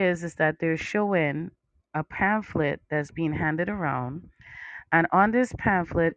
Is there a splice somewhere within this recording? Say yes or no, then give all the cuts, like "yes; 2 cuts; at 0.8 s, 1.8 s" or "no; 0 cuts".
no; 0 cuts